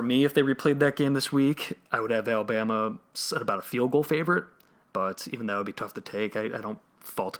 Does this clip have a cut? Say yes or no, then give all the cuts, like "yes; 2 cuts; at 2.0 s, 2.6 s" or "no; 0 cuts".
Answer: no; 0 cuts